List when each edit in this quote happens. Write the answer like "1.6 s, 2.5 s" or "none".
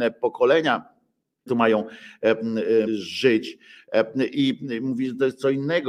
1.5 s, 2.9 s